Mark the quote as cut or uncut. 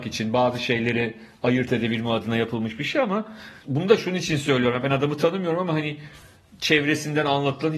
cut